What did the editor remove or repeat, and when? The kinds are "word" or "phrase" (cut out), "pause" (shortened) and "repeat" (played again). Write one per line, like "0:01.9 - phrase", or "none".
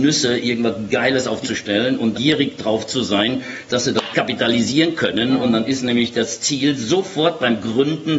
0:01.4 - word
0:02.1 - word
0:03.7 - word
0:04.1 - word